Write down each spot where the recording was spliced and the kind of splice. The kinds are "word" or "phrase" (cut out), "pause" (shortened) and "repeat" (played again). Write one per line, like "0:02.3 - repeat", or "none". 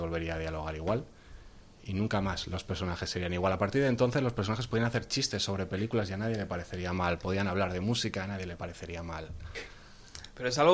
none